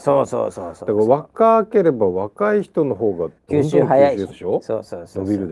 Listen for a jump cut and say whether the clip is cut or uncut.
cut